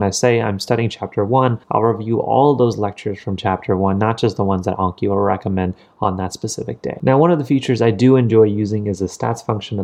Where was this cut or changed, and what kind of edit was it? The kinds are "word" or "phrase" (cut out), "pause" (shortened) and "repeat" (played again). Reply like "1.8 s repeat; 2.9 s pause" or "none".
1.6 s pause